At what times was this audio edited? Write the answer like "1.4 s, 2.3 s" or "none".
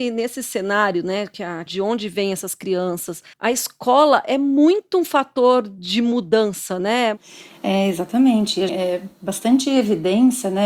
1.7 s, 3.3 s, 8.7 s